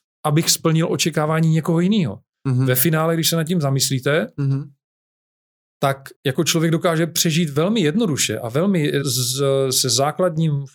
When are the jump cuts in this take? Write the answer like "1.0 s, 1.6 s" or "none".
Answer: 6.1 s, 9.0 s

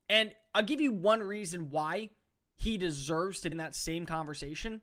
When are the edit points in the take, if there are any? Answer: 3.5 s

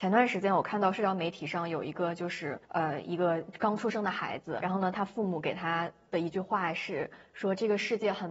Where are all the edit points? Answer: 2.6 s, 4.6 s

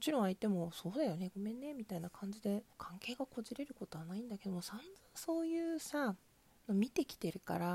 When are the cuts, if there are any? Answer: 2.7 s, 6.5 s

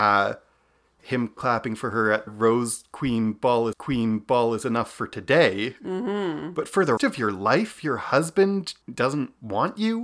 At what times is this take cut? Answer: 1.4 s, 2.3 s, 3.7 s, 7.0 s, 8.8 s

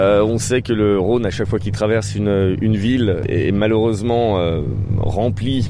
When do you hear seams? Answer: none

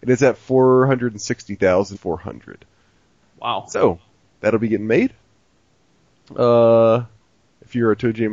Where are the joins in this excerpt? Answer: 1.9 s

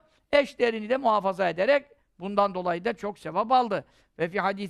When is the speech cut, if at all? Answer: none

